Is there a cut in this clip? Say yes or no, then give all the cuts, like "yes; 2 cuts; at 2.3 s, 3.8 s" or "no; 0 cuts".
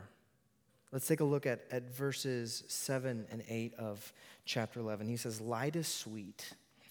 no; 0 cuts